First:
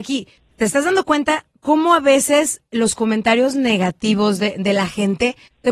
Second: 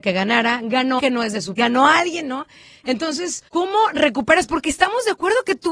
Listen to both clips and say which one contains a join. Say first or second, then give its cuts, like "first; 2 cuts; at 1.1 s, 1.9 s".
second; 3 cuts; at 1.0 s, 1.6 s, 3.5 s